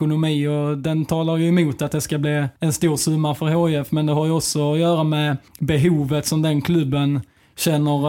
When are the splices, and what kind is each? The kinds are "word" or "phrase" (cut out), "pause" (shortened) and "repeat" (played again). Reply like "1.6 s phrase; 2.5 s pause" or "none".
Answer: 2.6 s pause; 5.5 s pause

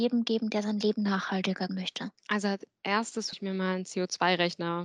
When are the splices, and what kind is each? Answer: 1.7 s word; 2.2 s pause; 3.3 s word

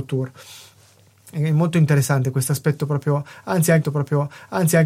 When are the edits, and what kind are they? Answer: 3.8 s repeat

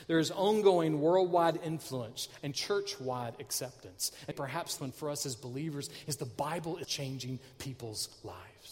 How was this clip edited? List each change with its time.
4.3 s word; 4.8 s word; 6.8 s word

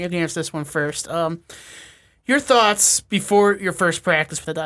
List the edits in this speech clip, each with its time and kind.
none

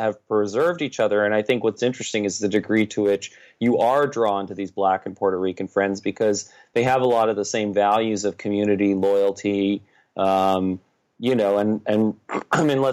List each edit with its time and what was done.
none

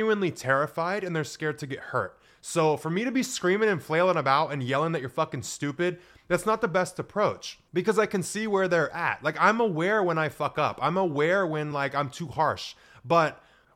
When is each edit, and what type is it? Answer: none

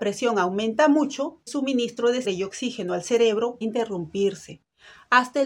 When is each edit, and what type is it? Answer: 1.5 s word; 2.2 s word; 3.6 s word

